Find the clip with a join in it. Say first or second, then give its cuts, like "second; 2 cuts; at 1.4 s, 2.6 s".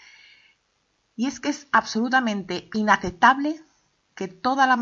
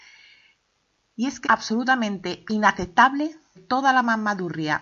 second; 2 cuts; at 1.4 s, 3.5 s